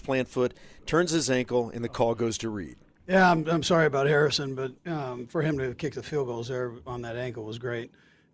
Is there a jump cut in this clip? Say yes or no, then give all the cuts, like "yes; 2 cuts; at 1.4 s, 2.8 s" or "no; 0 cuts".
yes; 1 cut; at 4.8 s